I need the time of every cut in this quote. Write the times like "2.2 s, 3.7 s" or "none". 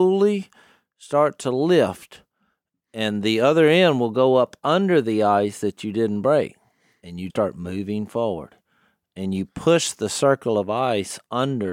7.3 s